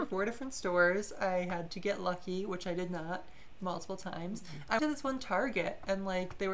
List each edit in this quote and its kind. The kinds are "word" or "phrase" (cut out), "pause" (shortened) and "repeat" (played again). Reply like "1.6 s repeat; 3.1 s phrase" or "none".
4.8 s word

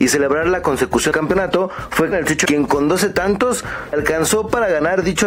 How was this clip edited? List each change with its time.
1.1 s word; 2.1 s word; 2.5 s word; 3.9 s word

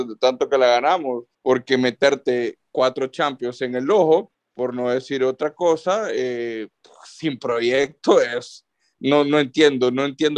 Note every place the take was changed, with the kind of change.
1.3 s pause; 4.3 s pause

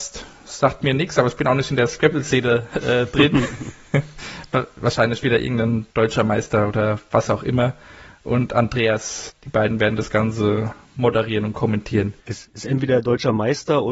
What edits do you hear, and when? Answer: 5.9 s pause; 9.3 s word; 12.2 s pause

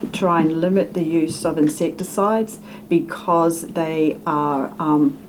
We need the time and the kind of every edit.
none

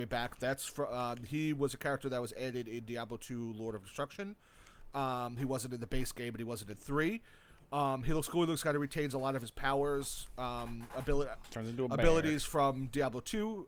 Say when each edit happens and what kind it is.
none

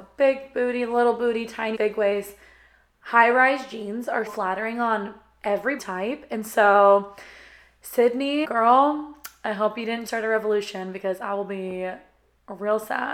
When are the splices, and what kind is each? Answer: 1.7 s word; 4.3 s word; 5.8 s word; 8.4 s word; 10.1 s word

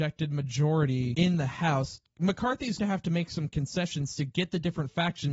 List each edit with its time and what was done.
2.8 s word

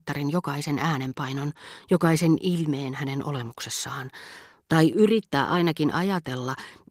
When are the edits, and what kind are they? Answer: none

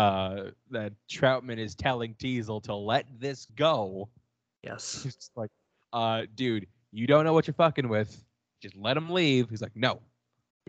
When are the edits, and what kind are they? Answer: 3.5 s pause

